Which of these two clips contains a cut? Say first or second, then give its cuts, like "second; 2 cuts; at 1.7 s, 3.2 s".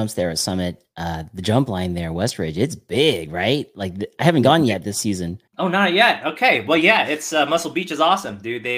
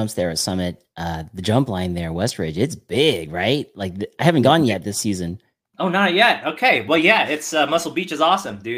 first; 1 cut; at 5.5 s